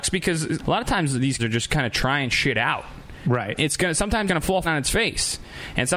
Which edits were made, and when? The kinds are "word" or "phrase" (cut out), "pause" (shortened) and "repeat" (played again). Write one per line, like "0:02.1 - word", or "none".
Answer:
0:01.4 - word
0:03.6 - word
0:04.3 - word
0:04.6 - word